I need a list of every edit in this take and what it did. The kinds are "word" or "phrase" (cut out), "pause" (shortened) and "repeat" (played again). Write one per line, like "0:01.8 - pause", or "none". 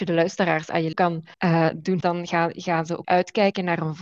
0:00.9 - word
0:01.3 - pause
0:02.0 - word
0:03.0 - word